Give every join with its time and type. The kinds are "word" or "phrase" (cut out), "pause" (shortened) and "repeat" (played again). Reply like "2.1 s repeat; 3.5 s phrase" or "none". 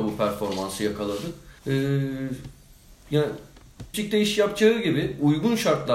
1.6 s pause; 3.9 s word